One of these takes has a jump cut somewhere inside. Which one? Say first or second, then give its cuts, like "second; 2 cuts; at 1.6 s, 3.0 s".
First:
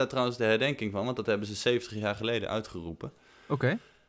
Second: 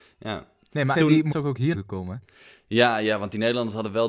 second; 3 cuts; at 0.9 s, 1.3 s, 1.7 s